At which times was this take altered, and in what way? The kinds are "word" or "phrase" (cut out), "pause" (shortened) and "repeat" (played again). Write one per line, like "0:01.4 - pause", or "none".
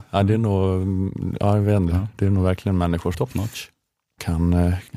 0:03.1 - word